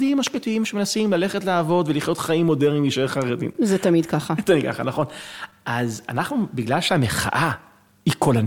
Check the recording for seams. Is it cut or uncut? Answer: uncut